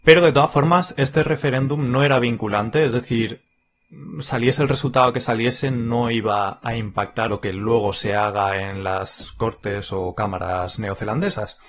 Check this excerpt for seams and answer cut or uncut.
cut